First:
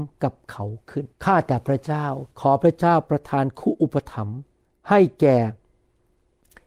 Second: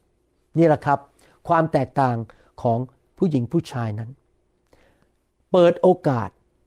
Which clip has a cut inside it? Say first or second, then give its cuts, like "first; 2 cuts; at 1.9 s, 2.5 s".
first; 3 cuts; at 1.1 s, 2.3 s, 4.6 s